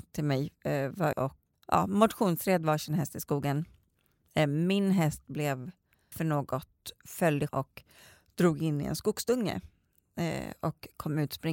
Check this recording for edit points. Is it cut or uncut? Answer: cut